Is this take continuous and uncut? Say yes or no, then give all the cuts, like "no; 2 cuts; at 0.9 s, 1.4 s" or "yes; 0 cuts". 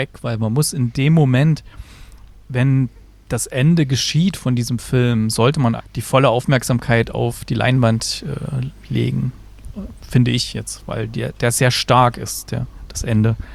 no; 1 cut; at 5.8 s